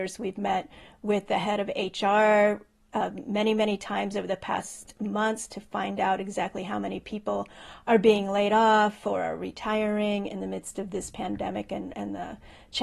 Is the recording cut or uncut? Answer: uncut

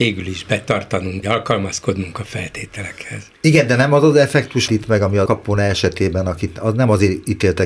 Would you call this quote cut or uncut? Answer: cut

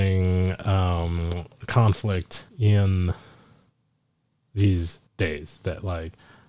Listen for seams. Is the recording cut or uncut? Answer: cut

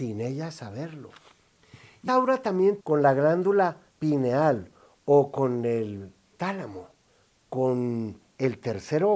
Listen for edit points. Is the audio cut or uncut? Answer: cut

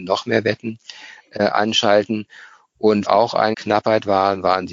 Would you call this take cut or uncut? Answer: cut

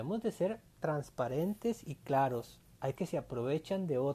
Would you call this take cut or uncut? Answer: cut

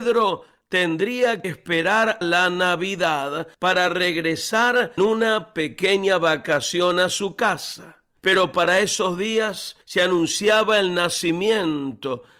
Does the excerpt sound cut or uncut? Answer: cut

